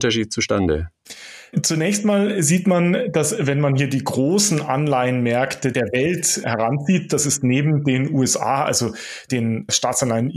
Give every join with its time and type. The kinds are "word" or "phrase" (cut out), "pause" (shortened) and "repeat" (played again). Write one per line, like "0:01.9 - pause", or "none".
none